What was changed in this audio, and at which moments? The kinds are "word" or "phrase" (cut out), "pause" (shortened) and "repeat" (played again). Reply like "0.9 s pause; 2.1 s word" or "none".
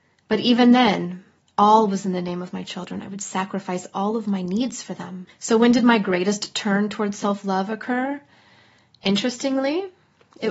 1.4 s pause; 5.3 s pause